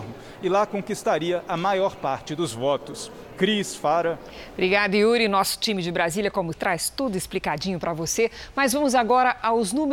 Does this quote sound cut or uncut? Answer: cut